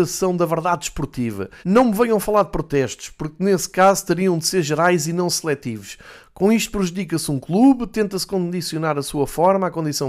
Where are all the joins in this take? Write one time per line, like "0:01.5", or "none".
0:01.6